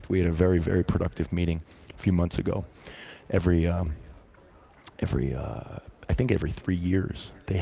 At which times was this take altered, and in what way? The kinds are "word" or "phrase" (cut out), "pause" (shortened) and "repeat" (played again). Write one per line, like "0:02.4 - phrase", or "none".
none

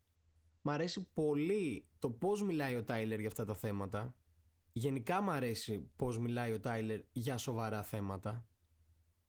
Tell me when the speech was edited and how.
0:04.4 - pause

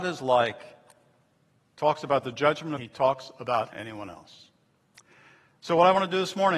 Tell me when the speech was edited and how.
0:02.8 - phrase
0:03.7 - phrase

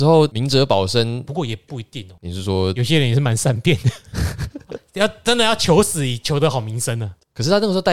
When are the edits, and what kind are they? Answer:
none

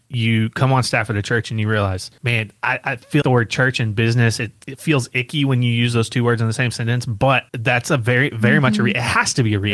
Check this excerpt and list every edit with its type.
0:02.2 - pause
0:03.2 - word
0:04.6 - word
0:07.5 - pause

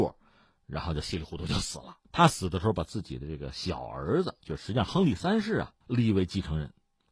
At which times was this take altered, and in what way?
0:02.0 - pause
0:05.8 - pause

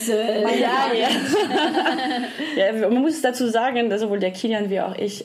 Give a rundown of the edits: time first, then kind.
none

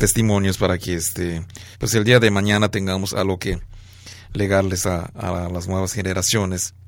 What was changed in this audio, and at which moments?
0:01.7 - pause

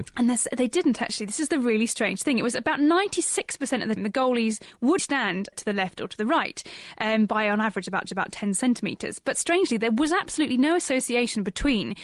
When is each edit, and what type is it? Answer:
0:04.0 - word
0:05.0 - word
0:05.5 - word
0:08.1 - repeat

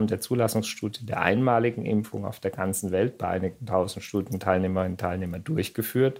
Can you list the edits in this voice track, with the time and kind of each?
none

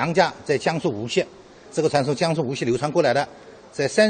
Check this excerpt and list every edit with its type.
none

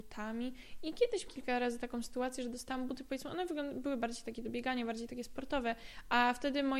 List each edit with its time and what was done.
0:01.3 - word

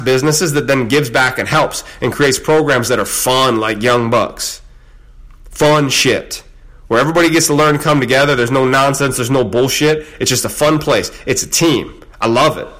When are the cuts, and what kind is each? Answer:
none

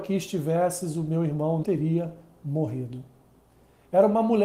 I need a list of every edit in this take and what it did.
0:01.6 - word

